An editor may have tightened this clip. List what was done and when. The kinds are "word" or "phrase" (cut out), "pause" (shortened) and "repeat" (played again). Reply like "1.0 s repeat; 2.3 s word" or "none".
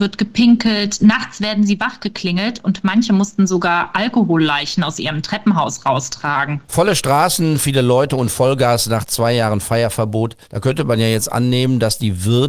6.6 s pause; 10.4 s pause